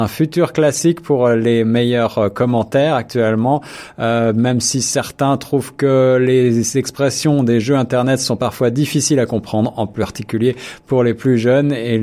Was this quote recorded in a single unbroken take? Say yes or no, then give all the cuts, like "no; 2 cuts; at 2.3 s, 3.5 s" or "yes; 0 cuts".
yes; 0 cuts